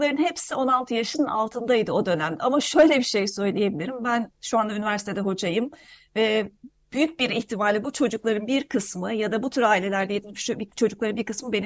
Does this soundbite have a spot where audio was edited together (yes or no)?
no